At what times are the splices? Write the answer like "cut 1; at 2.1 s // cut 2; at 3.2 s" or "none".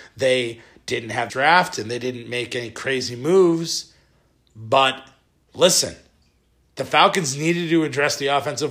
cut 1; at 1.3 s